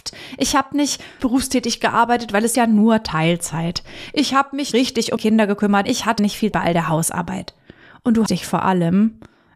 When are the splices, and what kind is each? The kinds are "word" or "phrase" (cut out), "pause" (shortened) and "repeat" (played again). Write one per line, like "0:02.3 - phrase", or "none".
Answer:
0:01.2 - word
0:02.5 - word
0:04.7 - word
0:05.2 - word
0:05.8 - word
0:06.2 - word
0:06.5 - word
0:08.3 - word